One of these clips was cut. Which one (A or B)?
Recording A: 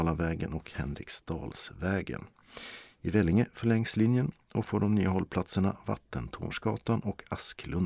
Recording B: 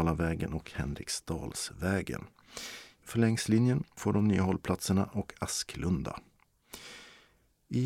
B